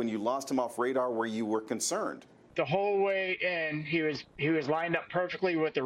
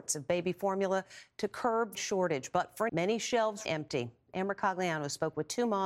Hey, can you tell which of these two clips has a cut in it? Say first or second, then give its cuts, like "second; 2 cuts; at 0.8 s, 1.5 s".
second; 3 cuts; at 1.9 s, 2.9 s, 3.6 s